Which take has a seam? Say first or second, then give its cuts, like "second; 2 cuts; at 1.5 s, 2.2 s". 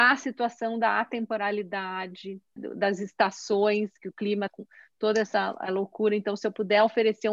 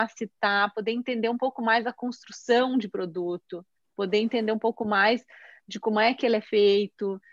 first; 2 cuts; at 2.6 s, 4.5 s